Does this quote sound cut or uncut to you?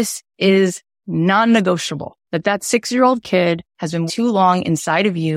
cut